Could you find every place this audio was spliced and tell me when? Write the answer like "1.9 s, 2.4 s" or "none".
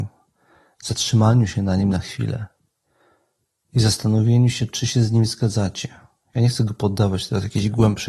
none